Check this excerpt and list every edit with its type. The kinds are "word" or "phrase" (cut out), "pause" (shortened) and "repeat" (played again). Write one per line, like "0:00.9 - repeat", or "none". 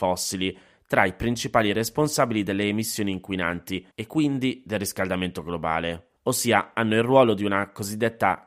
0:03.9 - pause
0:06.2 - pause